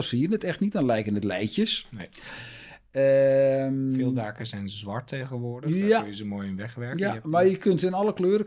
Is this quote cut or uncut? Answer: uncut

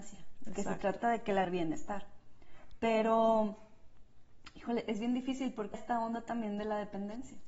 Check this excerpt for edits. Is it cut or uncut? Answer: cut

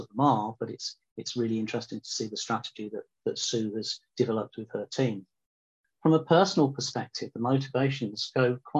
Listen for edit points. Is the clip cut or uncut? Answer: uncut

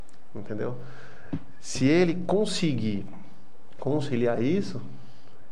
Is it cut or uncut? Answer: uncut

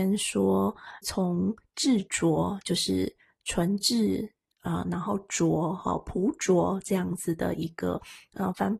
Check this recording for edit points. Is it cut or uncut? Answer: cut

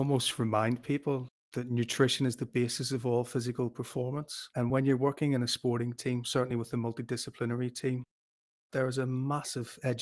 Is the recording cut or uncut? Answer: uncut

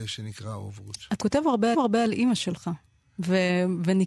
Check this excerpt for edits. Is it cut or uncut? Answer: cut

